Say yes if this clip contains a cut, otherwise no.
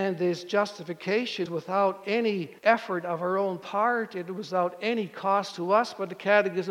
yes